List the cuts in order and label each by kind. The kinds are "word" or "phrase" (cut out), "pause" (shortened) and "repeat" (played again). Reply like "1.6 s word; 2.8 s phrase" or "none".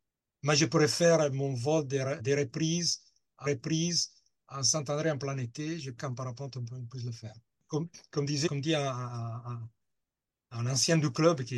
2.2 s word; 3.5 s repeat; 6.0 s phrase; 7.5 s pause; 8.5 s word